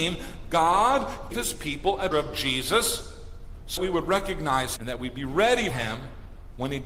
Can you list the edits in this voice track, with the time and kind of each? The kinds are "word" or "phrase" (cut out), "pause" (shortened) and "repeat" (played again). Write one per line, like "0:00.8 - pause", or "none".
0:01.3 - word
0:02.1 - word
0:03.8 - word
0:04.8 - word
0:05.7 - word